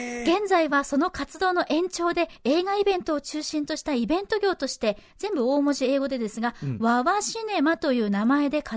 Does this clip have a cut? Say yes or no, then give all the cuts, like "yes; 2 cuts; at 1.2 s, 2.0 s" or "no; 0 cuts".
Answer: yes; 1 cut; at 2.4 s